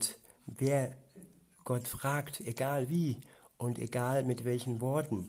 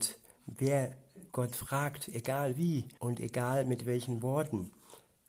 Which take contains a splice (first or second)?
second